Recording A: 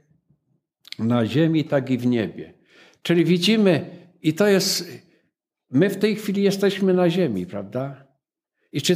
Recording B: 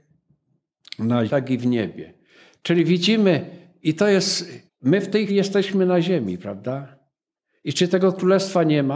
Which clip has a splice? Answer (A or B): B